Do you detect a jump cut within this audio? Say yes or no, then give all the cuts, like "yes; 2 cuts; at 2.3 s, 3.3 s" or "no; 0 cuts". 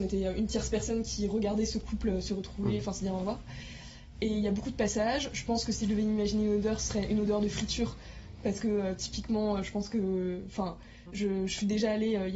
no; 0 cuts